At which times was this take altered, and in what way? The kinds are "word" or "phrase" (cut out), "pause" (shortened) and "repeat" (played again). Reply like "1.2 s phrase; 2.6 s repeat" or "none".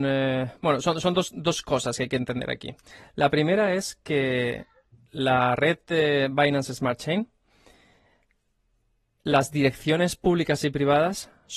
none